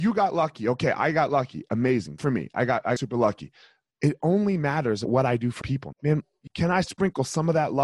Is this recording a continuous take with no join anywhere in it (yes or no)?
no